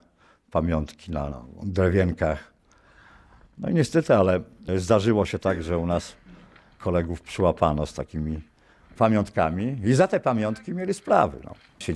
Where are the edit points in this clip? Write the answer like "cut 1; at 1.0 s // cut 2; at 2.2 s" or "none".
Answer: none

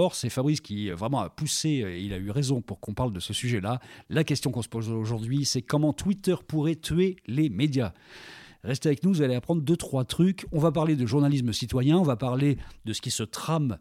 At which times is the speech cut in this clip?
none

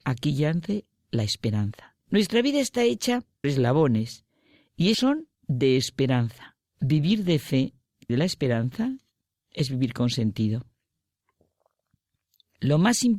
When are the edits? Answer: cut 1; at 2.0 s // cut 2; at 3.4 s // cut 3; at 4.9 s // cut 4; at 5.4 s // cut 5; at 6.7 s // cut 6; at 8.1 s

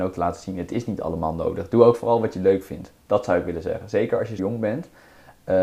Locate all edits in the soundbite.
cut 1; at 4.4 s

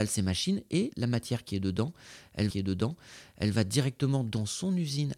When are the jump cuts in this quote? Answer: cut 1; at 0.9 s // cut 2; at 2.5 s

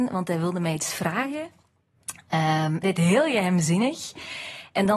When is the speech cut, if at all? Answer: cut 1; at 2.8 s

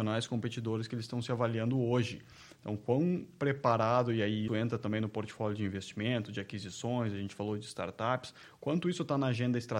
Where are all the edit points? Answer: cut 1; at 4.5 s

